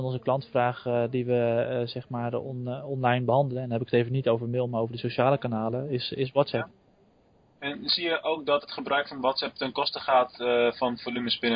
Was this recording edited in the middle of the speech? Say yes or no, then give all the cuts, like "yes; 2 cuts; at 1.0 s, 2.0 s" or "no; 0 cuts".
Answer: no; 0 cuts